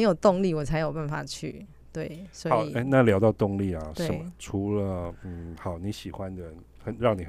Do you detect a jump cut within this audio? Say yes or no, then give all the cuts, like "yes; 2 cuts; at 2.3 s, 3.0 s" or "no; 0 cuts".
no; 0 cuts